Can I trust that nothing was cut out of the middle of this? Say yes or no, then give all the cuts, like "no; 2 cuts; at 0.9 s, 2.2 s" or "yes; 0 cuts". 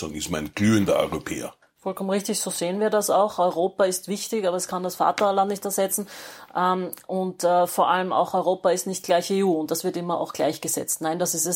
no; 1 cut; at 1.6 s